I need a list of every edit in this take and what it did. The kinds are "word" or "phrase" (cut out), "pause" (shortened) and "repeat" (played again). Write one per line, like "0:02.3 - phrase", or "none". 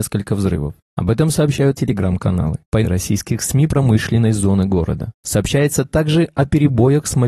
0:01.8 - word
0:02.8 - word
0:03.7 - phrase